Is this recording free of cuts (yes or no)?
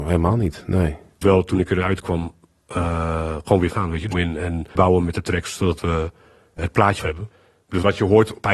no